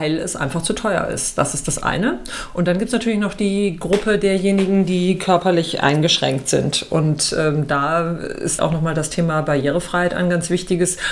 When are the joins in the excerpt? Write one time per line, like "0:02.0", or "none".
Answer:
0:08.6